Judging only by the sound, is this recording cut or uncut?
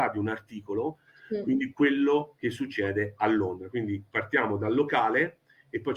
uncut